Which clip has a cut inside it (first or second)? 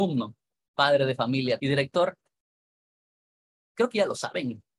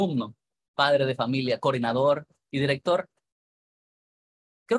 first